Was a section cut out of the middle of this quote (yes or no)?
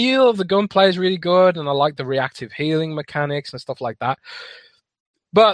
no